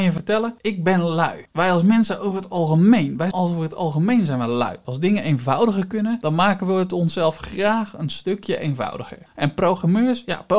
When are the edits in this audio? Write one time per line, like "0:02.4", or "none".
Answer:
0:03.3